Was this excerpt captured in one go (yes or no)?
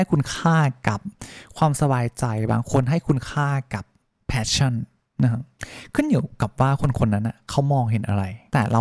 yes